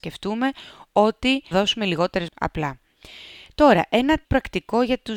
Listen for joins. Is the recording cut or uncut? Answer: cut